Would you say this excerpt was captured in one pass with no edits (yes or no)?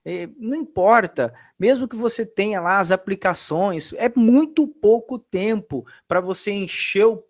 yes